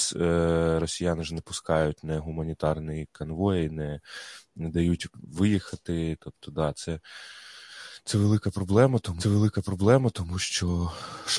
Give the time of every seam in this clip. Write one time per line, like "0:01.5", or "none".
0:09.2